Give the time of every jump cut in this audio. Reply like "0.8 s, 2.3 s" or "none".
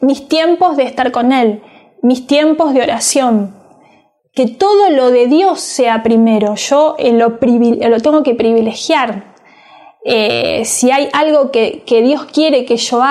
none